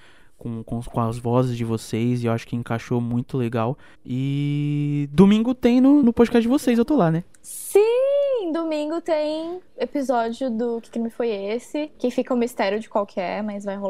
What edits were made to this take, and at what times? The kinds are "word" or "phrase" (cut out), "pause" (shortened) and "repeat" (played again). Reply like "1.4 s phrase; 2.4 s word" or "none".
6.0 s word; 7.3 s pause; 11.9 s pause

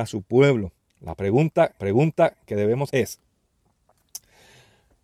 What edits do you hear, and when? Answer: 1.8 s repeat; 2.9 s word

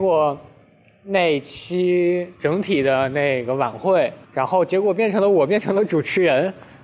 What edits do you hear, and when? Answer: 2.4 s pause; 4.2 s pause

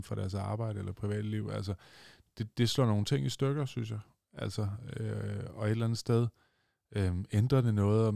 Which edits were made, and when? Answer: none

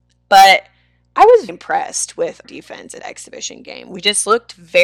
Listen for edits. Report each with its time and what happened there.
1.5 s word; 2.4 s word; 3.0 s word

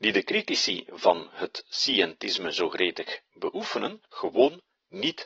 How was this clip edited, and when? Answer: 4.1 s pause

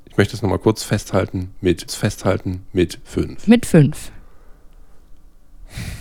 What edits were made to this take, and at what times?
1.9 s repeat

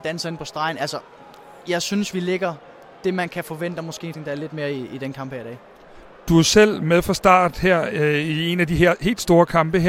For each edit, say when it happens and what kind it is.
1.6 s word; 4.1 s word

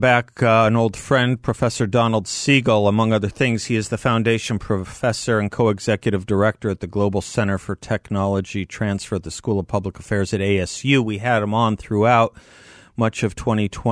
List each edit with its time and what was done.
none

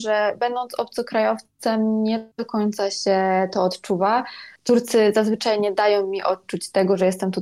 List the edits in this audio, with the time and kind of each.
2.3 s pause; 4.6 s pause

